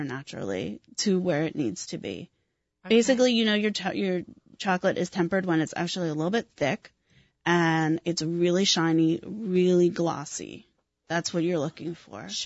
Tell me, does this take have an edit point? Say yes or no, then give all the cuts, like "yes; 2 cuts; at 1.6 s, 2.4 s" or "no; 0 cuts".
no; 0 cuts